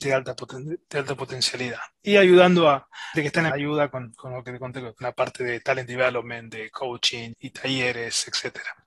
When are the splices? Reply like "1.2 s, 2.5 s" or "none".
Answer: 3.1 s, 3.5 s, 7.3 s